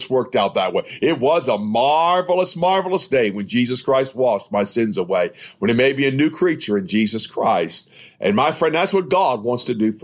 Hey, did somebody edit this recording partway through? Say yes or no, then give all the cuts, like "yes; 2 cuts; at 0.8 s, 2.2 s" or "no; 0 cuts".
no; 0 cuts